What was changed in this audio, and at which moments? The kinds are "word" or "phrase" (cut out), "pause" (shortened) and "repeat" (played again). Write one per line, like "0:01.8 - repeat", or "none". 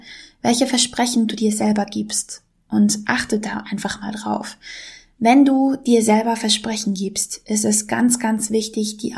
none